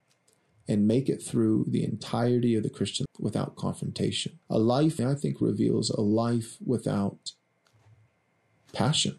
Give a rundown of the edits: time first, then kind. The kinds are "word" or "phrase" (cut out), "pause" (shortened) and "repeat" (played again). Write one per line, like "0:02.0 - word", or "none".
0:03.1 - word
0:04.4 - pause
0:05.0 - phrase